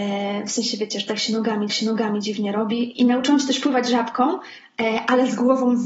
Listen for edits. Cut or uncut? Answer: cut